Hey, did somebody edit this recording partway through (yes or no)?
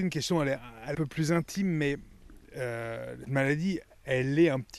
yes